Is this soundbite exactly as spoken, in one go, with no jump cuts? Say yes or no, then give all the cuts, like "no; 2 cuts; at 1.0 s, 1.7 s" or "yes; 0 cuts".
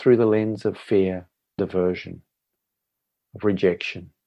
no; 1 cut; at 1.6 s